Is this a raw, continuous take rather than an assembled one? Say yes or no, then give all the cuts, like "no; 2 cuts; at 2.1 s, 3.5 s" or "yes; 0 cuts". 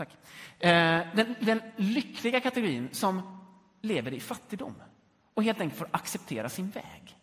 yes; 0 cuts